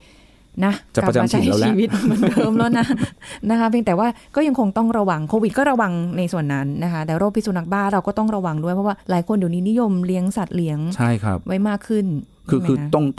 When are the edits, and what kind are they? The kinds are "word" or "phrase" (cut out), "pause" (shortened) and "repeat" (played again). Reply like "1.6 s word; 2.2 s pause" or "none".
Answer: 9.0 s pause